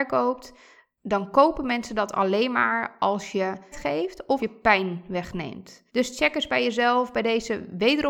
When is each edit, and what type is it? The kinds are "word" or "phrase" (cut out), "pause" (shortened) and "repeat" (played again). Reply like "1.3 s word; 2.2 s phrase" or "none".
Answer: 3.7 s word; 4.4 s word; 5.9 s pause